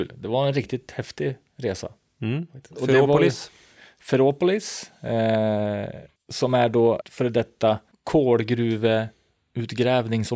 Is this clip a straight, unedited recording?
no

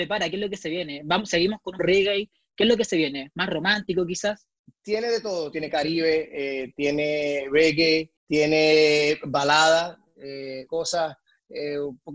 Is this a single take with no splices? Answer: no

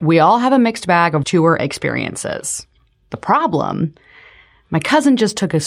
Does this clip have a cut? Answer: yes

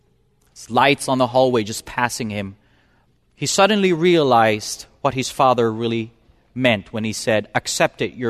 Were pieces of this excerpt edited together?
no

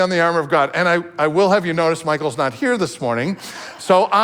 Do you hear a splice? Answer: no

